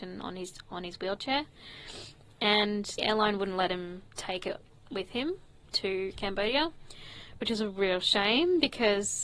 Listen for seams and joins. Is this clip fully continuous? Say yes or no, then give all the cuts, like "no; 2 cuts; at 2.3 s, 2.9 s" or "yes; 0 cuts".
no; 1 cut; at 3.0 s